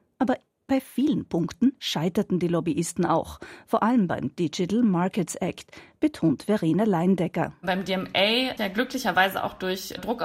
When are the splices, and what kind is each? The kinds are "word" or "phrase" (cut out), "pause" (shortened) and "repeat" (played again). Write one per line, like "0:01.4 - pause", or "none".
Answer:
0:08.6 - word